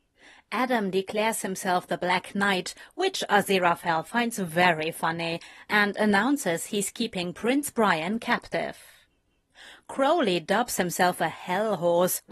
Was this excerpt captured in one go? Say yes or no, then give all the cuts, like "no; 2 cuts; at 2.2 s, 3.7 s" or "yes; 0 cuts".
yes; 0 cuts